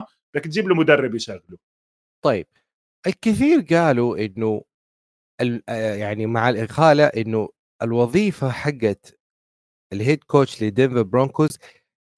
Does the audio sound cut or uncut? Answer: uncut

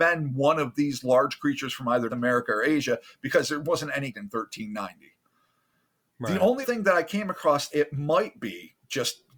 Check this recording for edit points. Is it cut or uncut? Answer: cut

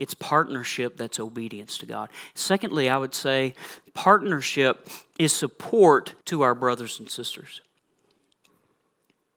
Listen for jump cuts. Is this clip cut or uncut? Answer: cut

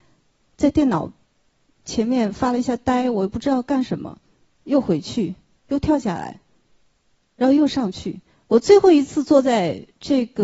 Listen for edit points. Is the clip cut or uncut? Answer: uncut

